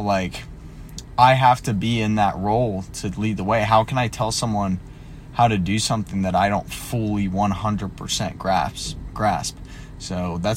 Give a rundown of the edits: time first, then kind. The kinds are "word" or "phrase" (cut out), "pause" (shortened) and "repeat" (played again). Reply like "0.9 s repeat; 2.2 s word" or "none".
none